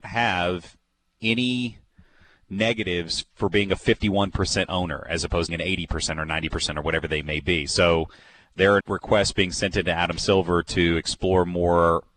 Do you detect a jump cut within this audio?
yes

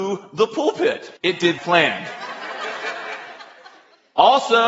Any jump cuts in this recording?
yes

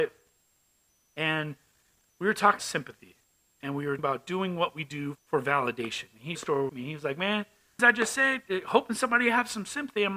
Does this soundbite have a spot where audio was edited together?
yes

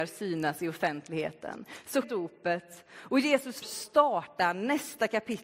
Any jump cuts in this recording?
yes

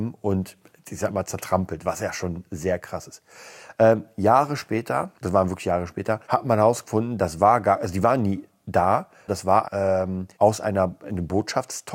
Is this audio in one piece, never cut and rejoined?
no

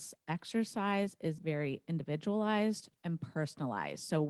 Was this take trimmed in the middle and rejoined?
yes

